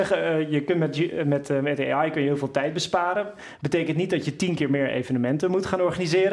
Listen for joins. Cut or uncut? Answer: uncut